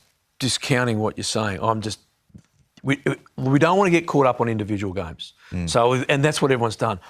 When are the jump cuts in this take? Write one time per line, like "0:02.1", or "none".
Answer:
none